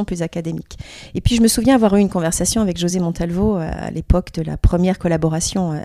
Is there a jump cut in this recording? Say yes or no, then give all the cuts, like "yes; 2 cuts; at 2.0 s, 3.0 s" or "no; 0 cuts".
no; 0 cuts